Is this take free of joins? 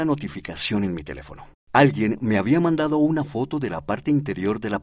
no; 1 cut; at 1.6 s

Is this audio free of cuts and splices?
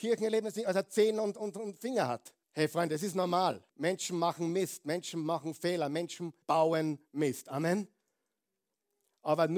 no; 3 cuts; at 2.4 s, 3.7 s, 6.4 s

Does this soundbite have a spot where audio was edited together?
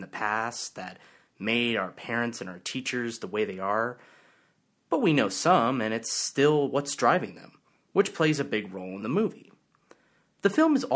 no; 0 cuts

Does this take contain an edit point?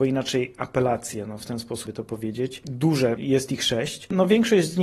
yes; 2 cuts; at 1.9 s, 3.2 s

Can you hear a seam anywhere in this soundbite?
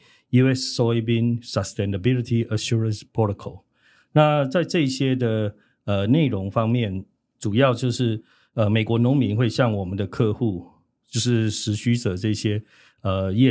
no; 0 cuts

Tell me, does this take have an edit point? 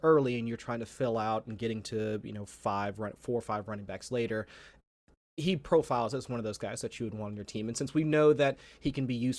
no; 0 cuts

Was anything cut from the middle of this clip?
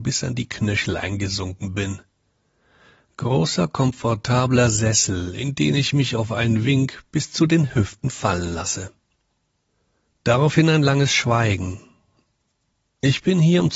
no; 0 cuts

